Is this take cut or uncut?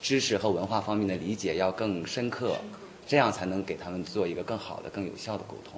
cut